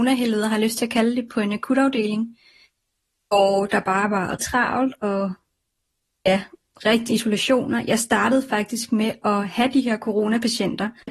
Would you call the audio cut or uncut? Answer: cut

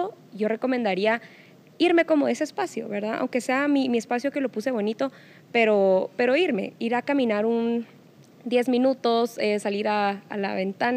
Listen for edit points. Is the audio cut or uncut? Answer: uncut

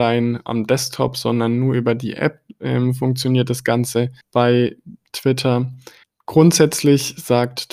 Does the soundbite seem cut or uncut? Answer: cut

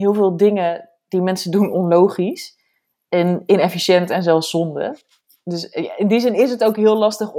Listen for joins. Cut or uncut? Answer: uncut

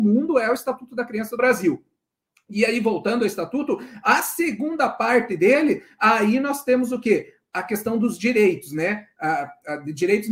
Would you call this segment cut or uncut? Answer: cut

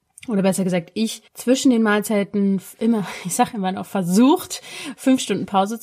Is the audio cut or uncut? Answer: cut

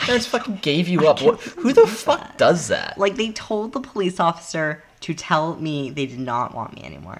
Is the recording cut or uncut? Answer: uncut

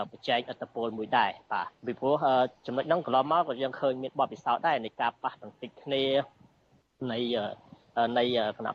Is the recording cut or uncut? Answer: cut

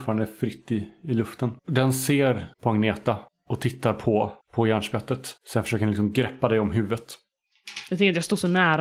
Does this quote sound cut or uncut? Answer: cut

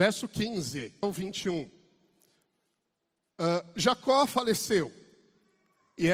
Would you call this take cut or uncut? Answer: cut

